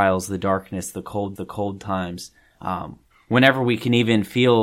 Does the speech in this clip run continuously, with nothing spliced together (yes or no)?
no